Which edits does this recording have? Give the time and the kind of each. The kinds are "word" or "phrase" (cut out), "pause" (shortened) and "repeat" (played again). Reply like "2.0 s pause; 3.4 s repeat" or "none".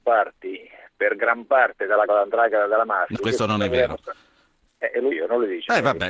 2.1 s word; 3.1 s word; 5.1 s word